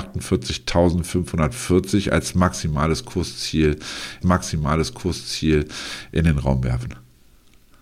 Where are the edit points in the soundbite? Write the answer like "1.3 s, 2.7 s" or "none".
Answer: 4.2 s